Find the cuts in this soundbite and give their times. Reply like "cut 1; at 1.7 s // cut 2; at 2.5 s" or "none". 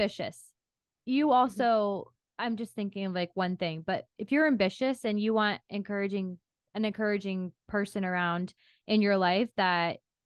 none